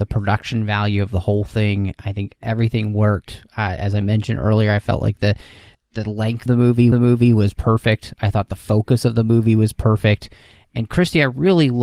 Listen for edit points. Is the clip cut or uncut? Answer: cut